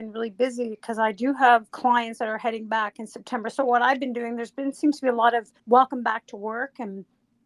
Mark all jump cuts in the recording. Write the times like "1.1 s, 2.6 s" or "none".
1.7 s, 5.6 s